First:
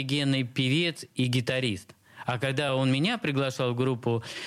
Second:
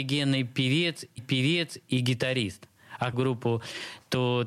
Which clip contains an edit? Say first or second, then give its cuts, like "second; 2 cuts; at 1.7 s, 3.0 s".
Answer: second; 2 cuts; at 1.2 s, 3.1 s